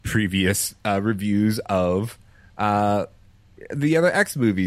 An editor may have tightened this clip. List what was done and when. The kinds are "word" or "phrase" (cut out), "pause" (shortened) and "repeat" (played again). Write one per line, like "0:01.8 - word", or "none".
none